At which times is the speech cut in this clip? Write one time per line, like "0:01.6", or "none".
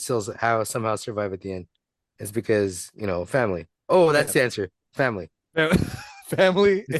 none

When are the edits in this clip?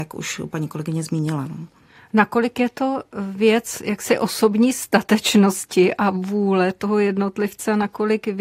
none

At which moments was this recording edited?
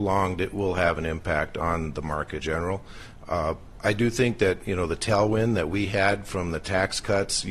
0:02.4

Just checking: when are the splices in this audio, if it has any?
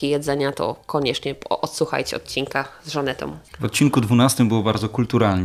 0:03.5

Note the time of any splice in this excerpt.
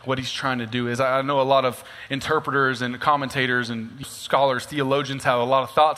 0:04.0

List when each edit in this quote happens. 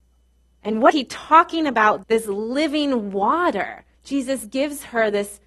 0:00.9
0:02.0
0:03.9

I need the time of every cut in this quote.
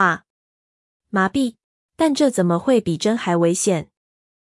0:01.8

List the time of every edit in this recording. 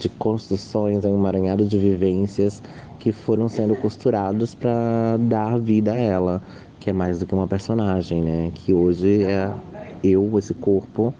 none

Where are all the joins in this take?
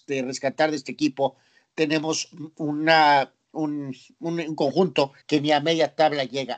0:05.2

